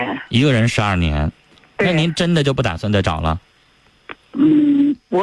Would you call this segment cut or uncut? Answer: uncut